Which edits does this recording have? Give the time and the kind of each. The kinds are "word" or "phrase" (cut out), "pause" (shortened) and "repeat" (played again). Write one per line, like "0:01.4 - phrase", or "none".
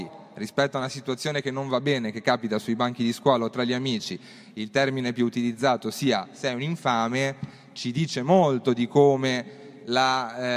none